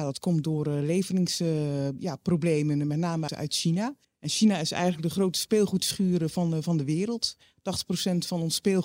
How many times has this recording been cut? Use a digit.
2